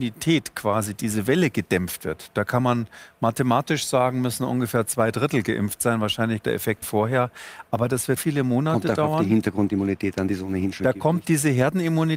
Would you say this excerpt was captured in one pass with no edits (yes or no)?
no